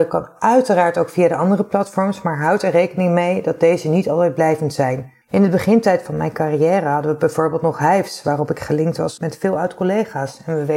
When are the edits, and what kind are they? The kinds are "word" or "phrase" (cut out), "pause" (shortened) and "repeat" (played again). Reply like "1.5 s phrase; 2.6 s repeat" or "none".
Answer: 5.2 s pause